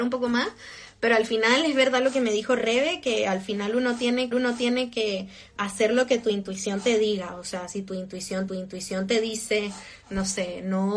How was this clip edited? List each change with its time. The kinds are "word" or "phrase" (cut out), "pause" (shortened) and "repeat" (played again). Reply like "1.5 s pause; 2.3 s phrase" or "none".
4.3 s repeat; 8.5 s repeat